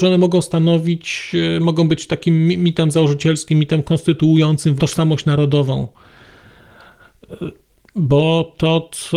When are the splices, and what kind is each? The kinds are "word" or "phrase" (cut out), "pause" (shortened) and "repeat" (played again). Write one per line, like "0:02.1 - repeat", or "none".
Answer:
0:04.8 - word